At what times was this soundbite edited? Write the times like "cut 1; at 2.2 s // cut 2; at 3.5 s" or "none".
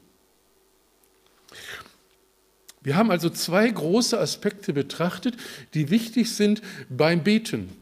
none